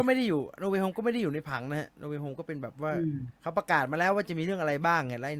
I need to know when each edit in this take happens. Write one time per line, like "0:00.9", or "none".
0:03.4